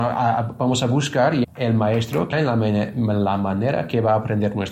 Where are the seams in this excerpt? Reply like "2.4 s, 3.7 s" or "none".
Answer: 1.4 s, 2.3 s